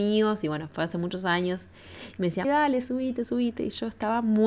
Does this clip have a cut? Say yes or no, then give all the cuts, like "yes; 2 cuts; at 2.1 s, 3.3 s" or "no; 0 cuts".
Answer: yes; 2 cuts; at 2.4 s, 2.8 s